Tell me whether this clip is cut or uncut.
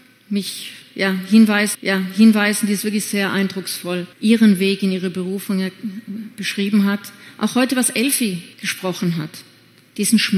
cut